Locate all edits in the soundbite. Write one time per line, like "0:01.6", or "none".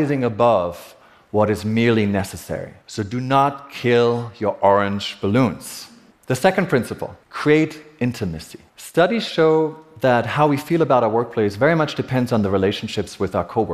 0:02.8
0:06.1
0:07.2
0:08.7